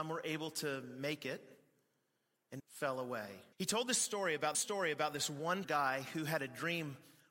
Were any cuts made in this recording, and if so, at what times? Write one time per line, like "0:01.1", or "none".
0:02.6
0:03.5
0:04.5
0:05.6